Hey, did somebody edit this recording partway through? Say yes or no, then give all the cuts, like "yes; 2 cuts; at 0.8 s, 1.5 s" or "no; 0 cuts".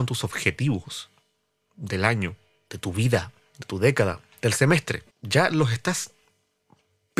yes; 1 cut; at 5.1 s